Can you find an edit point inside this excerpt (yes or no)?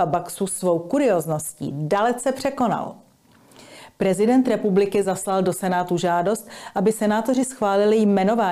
no